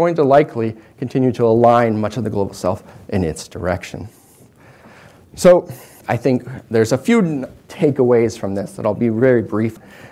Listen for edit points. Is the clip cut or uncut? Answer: uncut